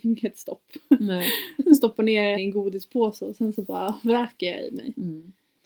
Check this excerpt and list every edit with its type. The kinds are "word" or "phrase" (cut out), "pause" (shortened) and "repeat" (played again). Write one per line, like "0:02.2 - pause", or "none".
0:02.3 - word